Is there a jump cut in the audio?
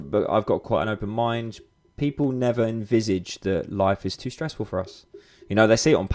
no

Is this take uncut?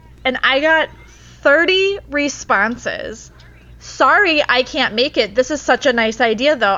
yes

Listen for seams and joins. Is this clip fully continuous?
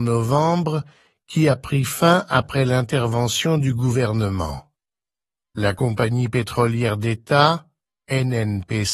yes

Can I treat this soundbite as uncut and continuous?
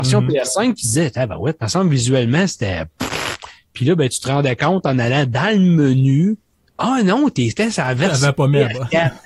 yes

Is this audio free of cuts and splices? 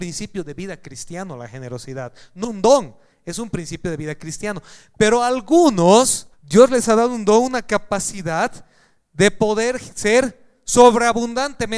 no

